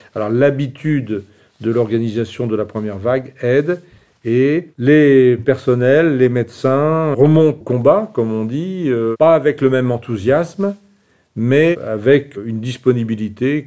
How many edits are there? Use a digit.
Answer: 1